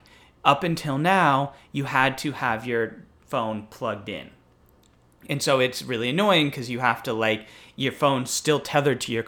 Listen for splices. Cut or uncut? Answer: uncut